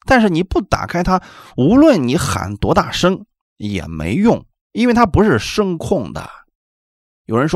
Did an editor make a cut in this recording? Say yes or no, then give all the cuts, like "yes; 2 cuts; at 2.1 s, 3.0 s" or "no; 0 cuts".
no; 0 cuts